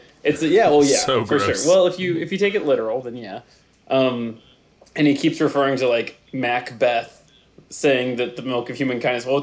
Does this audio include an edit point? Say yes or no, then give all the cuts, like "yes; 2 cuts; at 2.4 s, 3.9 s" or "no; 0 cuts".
no; 0 cuts